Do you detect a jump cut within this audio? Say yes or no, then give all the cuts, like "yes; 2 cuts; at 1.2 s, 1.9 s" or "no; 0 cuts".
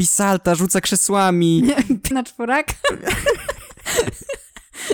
yes; 1 cut; at 2.1 s